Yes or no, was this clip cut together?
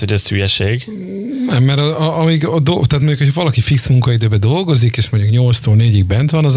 no